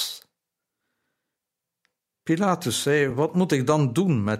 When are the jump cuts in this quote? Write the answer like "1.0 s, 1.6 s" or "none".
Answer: none